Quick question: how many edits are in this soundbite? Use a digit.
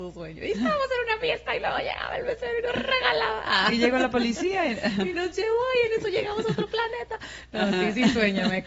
0